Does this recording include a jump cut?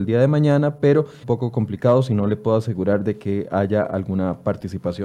yes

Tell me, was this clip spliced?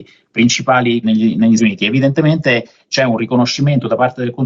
yes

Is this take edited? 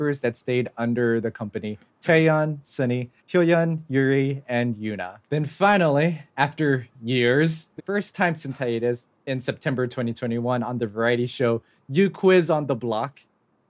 yes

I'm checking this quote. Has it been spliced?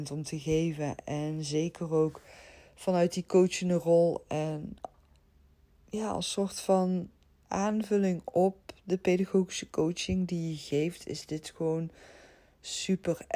no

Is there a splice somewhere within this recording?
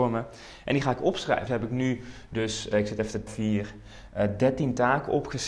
yes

